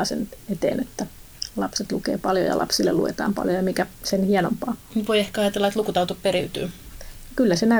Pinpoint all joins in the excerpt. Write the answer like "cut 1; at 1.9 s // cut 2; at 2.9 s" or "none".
cut 1; at 3.9 s

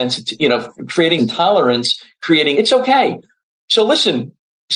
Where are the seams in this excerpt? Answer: cut 1; at 1.2 s // cut 2; at 2.5 s

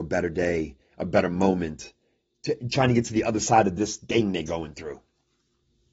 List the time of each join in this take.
none

